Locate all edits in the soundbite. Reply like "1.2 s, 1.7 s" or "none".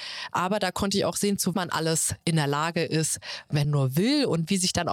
1.5 s, 3.6 s